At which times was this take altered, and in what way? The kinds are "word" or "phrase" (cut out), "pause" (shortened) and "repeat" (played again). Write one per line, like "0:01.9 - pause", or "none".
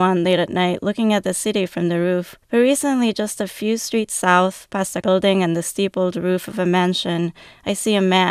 0:02.4 - pause
0:05.0 - word